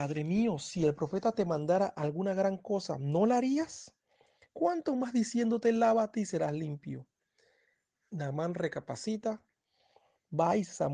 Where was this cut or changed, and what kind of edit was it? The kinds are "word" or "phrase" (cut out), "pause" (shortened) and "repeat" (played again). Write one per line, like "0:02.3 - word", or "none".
none